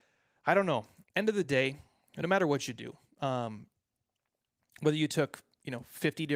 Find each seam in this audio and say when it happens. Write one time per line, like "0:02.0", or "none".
none